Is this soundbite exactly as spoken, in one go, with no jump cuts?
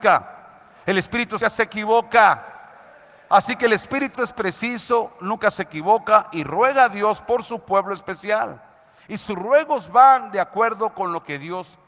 no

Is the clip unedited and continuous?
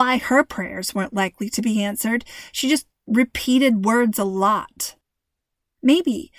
yes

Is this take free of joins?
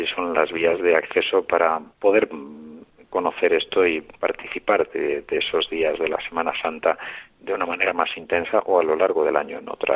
yes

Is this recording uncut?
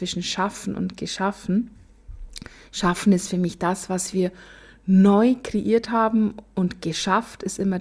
yes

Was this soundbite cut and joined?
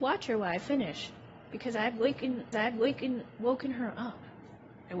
yes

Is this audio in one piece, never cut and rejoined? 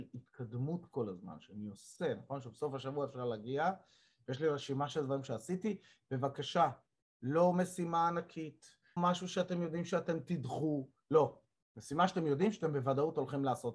no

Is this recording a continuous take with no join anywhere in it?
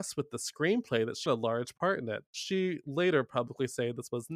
no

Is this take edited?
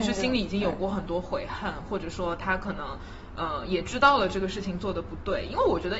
no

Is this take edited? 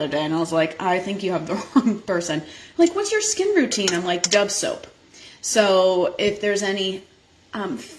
no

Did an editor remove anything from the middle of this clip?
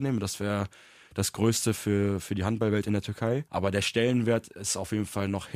yes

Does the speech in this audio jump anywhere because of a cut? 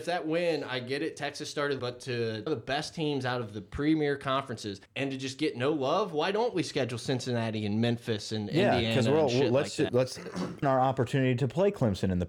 yes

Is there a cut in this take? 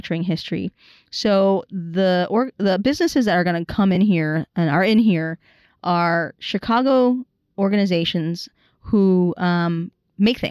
no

